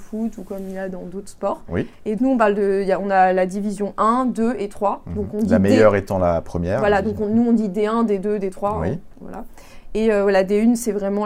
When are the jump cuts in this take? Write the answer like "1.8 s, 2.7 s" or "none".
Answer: 2.2 s, 9.2 s

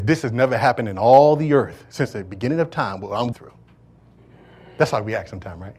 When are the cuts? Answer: 3.3 s

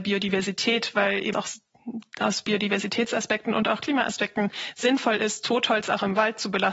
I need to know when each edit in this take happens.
1.3 s

